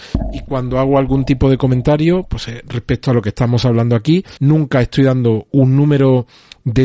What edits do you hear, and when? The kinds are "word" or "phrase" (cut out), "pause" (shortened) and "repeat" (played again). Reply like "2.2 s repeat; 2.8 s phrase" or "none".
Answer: 4.4 s pause